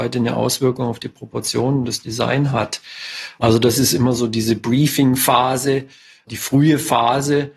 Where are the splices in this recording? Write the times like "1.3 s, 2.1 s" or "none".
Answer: none